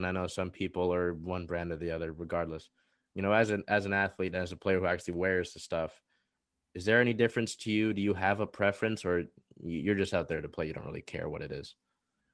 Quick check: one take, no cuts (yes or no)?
yes